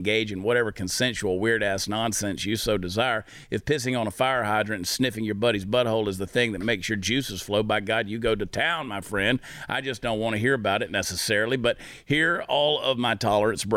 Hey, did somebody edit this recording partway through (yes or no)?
no